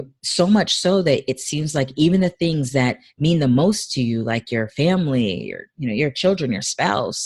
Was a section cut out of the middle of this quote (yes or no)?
no